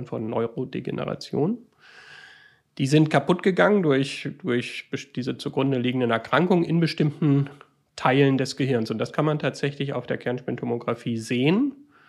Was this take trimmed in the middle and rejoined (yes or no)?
no